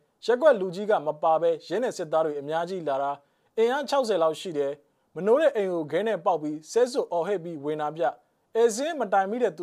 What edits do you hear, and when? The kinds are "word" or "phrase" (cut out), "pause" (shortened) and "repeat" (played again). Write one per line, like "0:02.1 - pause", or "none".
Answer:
none